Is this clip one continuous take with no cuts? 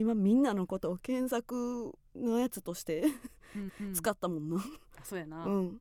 no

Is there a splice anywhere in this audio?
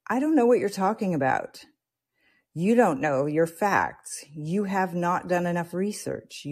no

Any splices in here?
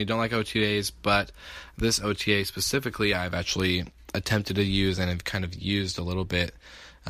no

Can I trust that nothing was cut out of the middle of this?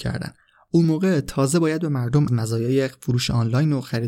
no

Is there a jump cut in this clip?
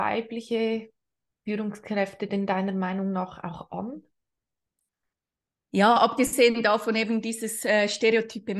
no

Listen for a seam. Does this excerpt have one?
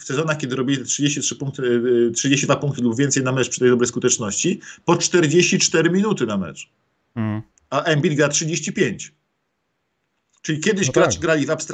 no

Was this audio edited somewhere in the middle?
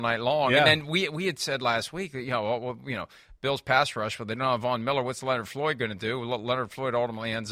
no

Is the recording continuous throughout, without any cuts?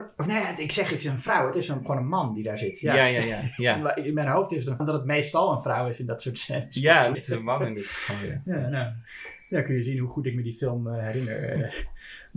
no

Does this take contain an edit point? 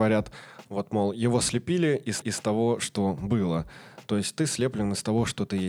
yes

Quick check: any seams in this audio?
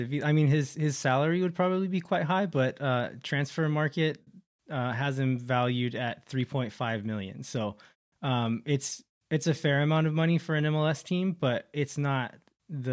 no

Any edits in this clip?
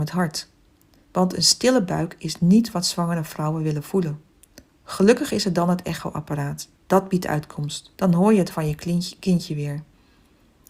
yes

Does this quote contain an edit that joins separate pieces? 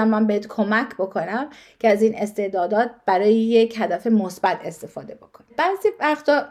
no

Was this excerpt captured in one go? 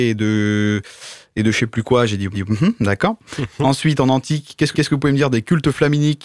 no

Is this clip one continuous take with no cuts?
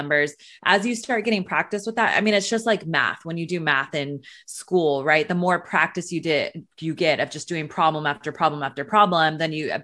yes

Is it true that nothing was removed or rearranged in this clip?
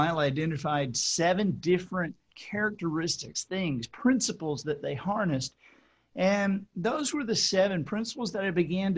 yes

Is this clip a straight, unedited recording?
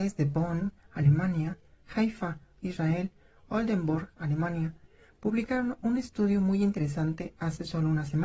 yes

